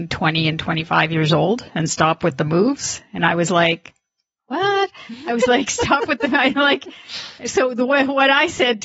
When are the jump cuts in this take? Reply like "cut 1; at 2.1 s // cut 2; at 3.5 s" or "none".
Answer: none